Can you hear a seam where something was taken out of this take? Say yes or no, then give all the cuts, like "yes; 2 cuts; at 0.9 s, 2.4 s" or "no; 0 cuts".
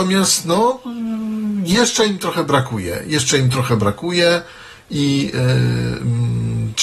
no; 0 cuts